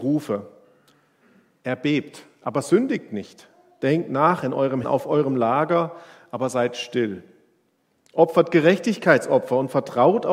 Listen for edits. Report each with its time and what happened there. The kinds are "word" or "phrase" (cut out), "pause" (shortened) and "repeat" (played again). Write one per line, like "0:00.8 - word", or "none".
0:04.8 - word